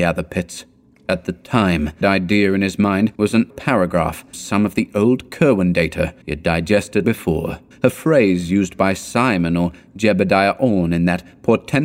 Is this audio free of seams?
no; 7 cuts; at 2.0 s, 3.1 s, 3.5 s, 4.3 s, 6.2 s, 7.0 s, 7.7 s

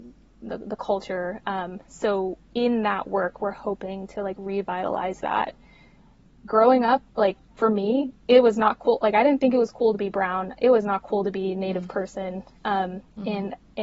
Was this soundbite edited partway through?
no; 0 cuts

